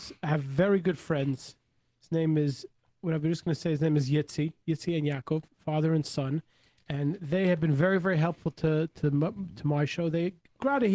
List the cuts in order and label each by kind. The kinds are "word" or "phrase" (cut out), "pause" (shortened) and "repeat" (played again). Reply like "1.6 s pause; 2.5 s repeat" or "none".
none